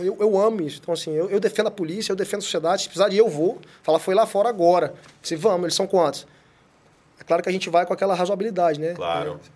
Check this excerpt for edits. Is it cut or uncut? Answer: uncut